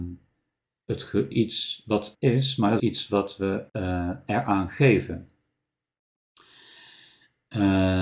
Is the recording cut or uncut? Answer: cut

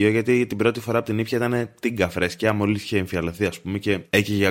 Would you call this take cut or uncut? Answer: uncut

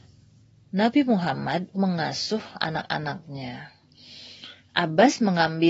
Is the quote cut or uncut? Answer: cut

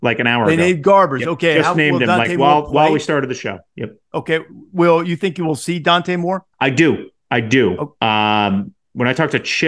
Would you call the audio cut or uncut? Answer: cut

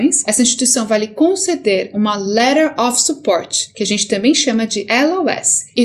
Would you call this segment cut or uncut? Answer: uncut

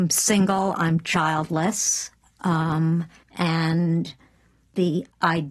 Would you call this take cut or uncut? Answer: cut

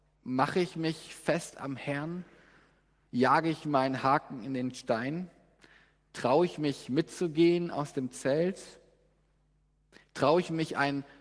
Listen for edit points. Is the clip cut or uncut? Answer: uncut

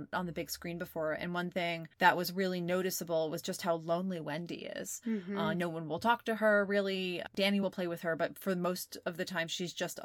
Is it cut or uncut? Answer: uncut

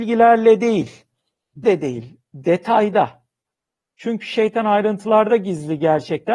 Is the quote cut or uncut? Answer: cut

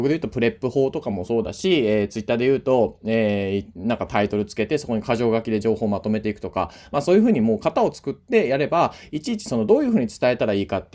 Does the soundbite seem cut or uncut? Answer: uncut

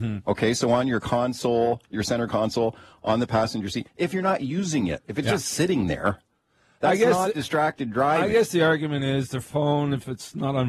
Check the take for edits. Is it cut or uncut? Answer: uncut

